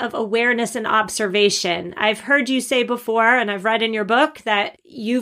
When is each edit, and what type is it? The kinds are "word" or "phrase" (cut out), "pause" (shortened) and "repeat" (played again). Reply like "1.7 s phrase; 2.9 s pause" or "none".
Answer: none